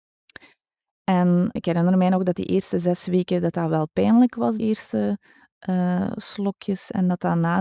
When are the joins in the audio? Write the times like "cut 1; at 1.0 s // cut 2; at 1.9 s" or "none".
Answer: cut 1; at 1.6 s // cut 2; at 4.6 s